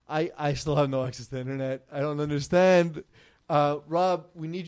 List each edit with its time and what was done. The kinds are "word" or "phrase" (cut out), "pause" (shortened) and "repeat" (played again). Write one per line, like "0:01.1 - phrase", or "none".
none

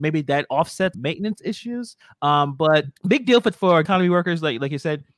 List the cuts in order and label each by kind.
0:00.9 - word
0:02.0 - pause
0:03.0 - pause
0:03.5 - word
0:03.8 - word

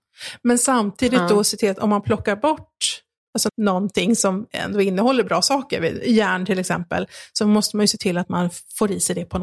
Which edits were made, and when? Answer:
0:03.5 - phrase

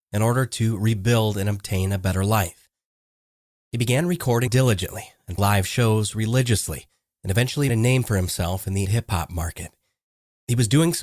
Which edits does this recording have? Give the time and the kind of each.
0:04.5 - word
0:05.4 - word
0:07.7 - word
0:08.8 - word

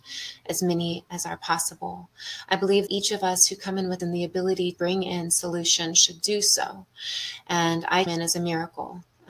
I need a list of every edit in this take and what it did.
0:02.9 - word
0:04.0 - word
0:04.7 - word
0:08.1 - word

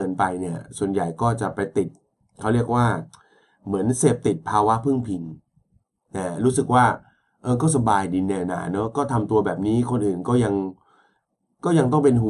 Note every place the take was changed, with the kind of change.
none

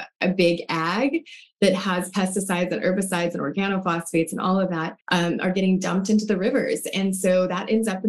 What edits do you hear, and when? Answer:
0:05.0 - pause

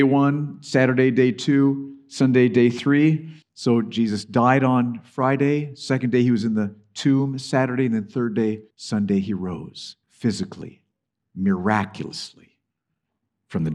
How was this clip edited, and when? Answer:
0:03.4 - pause
0:08.7 - pause
0:10.0 - pause

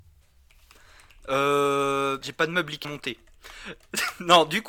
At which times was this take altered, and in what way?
0:02.2 - word
0:02.8 - word

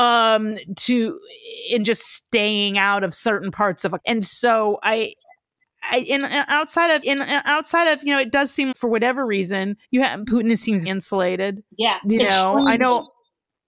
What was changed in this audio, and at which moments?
0:04.0 - word
0:07.0 - repeat
0:08.7 - word
0:09.8 - pause
0:10.9 - word
0:11.7 - pause

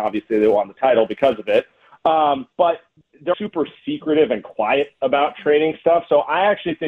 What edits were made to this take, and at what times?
0:02.5 - pause
0:03.3 - word

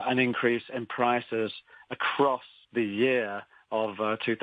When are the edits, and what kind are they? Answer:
0:02.6 - word

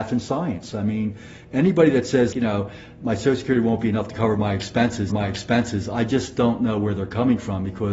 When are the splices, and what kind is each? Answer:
0:02.3 - word
0:05.1 - repeat

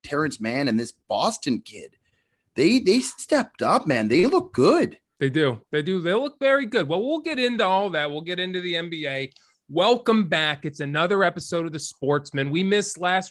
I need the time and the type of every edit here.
none

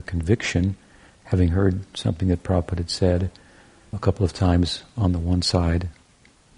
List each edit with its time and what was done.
0:03.9 - word

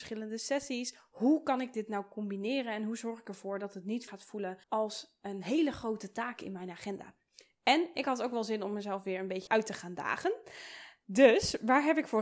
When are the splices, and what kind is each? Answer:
0:04.1 - word
0:04.6 - pause
0:09.5 - word

